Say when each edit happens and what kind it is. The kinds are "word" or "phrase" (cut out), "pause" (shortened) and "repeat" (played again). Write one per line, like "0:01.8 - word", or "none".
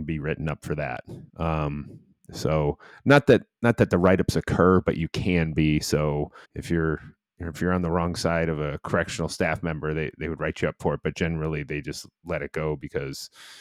0:01.3 - pause
0:06.4 - pause